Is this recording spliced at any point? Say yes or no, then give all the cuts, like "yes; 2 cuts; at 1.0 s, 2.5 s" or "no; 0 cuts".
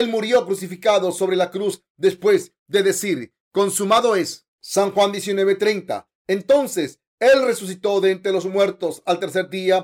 yes; 1 cut; at 4.5 s